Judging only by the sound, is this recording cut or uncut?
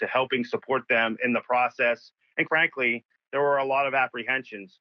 cut